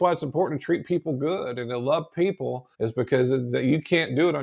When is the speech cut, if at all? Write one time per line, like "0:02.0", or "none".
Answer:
0:02.7